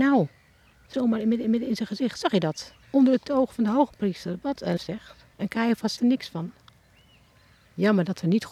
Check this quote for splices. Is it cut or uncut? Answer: cut